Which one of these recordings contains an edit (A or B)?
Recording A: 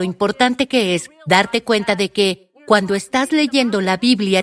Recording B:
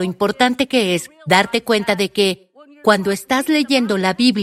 A